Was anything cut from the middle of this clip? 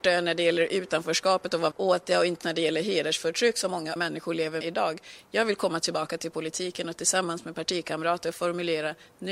yes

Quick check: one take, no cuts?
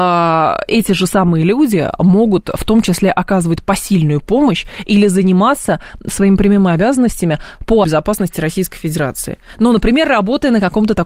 no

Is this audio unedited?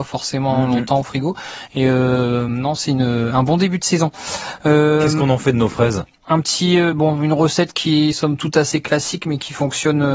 yes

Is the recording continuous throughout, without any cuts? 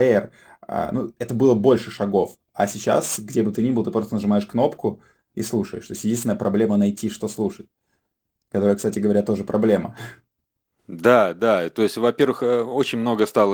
yes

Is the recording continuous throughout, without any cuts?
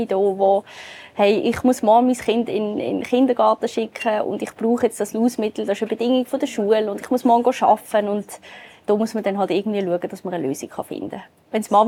yes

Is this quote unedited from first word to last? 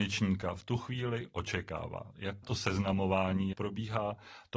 no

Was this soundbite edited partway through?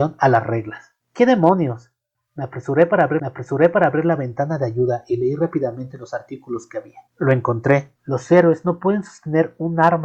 yes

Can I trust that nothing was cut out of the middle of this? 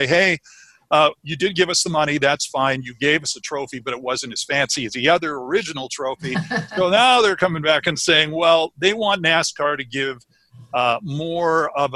yes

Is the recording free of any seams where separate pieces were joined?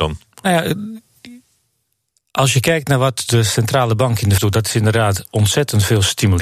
no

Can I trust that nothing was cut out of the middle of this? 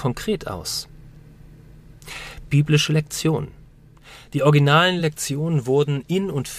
yes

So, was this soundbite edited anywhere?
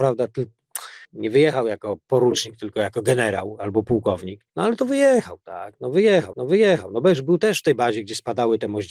yes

